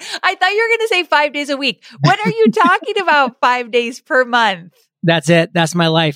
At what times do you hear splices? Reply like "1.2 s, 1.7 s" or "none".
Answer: none

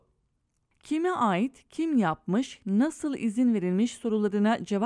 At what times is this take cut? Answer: none

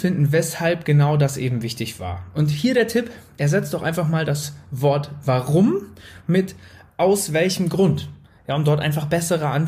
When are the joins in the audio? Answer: none

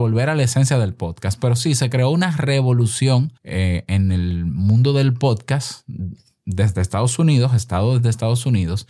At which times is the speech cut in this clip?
3.4 s

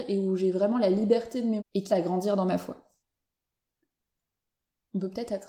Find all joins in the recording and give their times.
1.6 s, 1.9 s

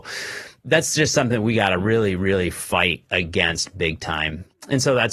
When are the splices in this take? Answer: none

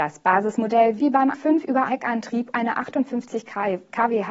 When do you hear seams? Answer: 1.0 s, 1.3 s, 1.9 s, 2.5 s

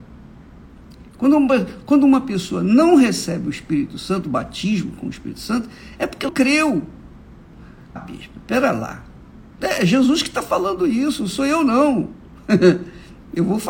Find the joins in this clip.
6.3 s, 8.0 s

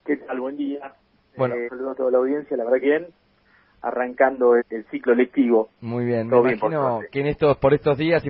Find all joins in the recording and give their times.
1.7 s, 2.8 s, 4.6 s, 7.1 s

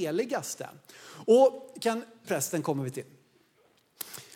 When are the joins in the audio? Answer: 2.2 s

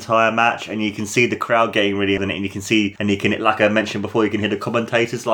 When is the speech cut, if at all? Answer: 2.2 s

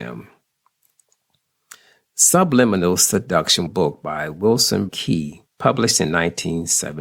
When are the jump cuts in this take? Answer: 3.7 s, 4.9 s, 5.5 s

